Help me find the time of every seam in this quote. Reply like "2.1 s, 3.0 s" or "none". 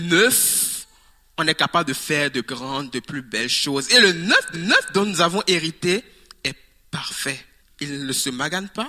2.4 s, 4.5 s, 7.6 s